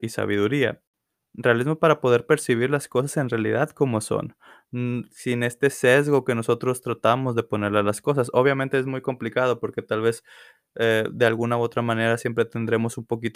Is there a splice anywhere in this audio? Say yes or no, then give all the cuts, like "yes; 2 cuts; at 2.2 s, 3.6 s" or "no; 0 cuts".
no; 0 cuts